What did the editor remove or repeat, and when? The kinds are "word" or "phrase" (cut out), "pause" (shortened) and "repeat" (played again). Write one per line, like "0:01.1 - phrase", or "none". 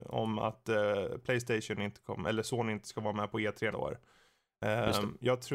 0:03.7 - word